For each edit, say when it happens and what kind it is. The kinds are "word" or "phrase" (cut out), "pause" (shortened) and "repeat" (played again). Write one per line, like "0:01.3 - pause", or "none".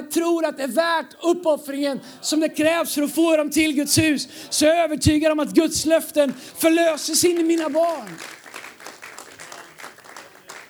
none